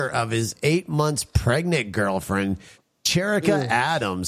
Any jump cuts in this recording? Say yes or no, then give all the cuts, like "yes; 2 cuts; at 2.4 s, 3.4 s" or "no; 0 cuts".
no; 0 cuts